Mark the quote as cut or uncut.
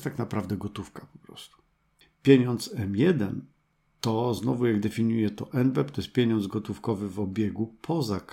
uncut